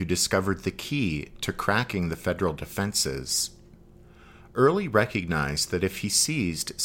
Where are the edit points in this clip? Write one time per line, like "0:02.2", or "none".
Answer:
none